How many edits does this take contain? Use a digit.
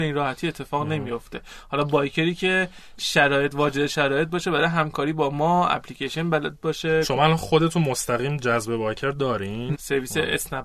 1